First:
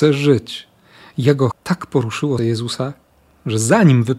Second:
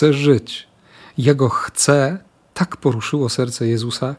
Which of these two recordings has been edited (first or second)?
first